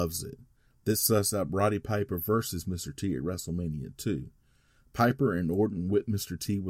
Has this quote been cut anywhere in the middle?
no; 0 cuts

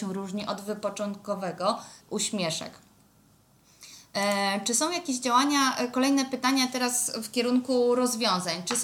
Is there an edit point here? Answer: yes; 1 cut; at 2.0 s

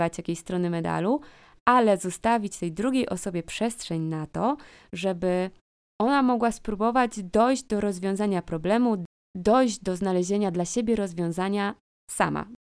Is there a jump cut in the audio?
no; 0 cuts

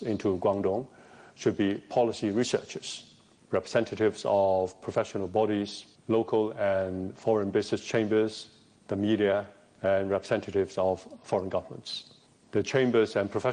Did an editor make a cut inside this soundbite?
no; 0 cuts

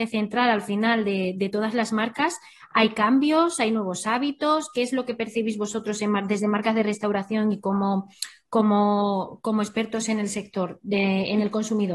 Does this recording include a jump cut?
no; 0 cuts

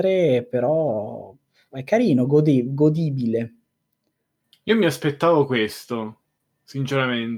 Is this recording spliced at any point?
no; 0 cuts

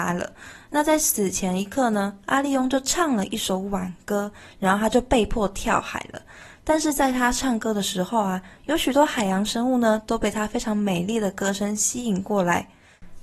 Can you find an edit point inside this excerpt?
no; 0 cuts

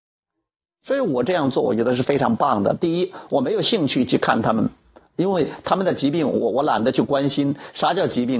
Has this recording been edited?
no; 0 cuts

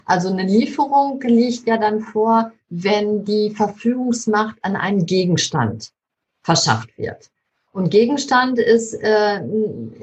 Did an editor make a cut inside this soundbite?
no; 0 cuts

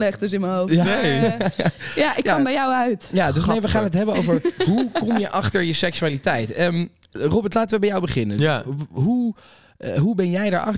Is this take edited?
no; 0 cuts

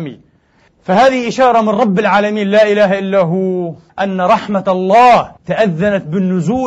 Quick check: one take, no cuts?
no; 2 cuts; at 3.9 s, 5.4 s

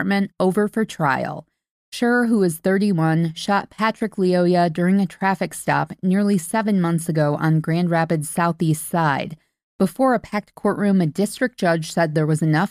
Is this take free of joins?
yes; 0 cuts

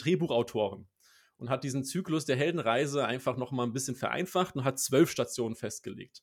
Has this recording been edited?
no; 0 cuts

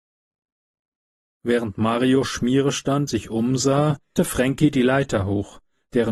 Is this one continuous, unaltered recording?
no; 2 cuts; at 3.1 s, 4.2 s

